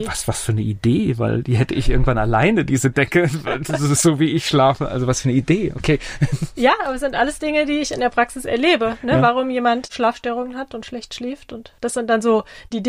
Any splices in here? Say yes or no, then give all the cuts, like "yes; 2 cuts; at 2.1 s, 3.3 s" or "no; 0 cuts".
no; 0 cuts